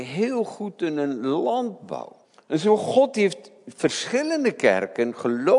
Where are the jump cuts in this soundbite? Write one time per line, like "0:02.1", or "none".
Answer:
0:02.2